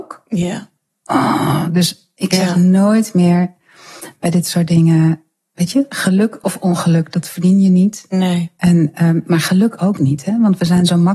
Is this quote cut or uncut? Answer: uncut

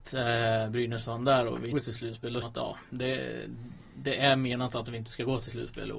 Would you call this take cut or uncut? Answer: cut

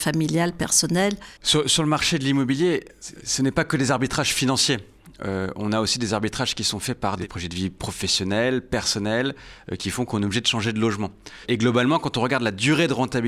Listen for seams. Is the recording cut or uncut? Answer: cut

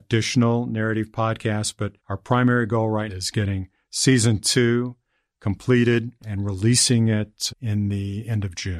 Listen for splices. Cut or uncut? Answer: cut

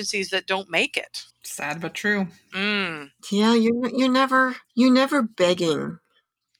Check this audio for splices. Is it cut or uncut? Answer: cut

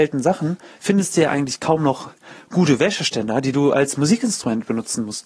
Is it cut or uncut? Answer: uncut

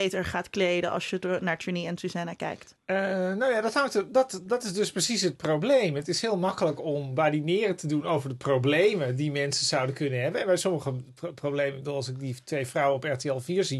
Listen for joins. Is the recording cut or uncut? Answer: uncut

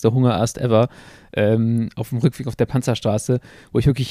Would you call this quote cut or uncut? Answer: uncut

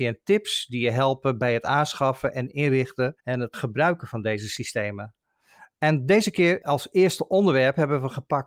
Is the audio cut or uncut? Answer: cut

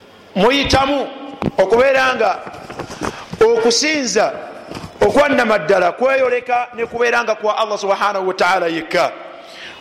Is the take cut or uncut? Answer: uncut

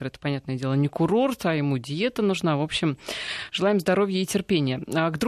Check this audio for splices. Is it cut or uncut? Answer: uncut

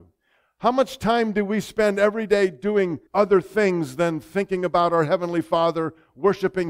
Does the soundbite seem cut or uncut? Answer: cut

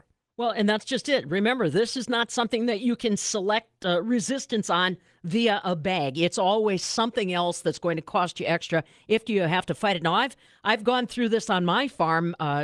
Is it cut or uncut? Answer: uncut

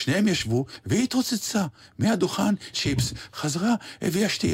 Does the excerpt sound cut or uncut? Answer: cut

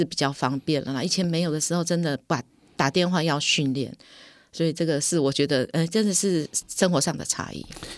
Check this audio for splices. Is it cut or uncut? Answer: uncut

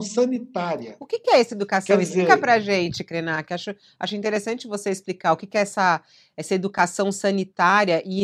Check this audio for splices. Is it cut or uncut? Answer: uncut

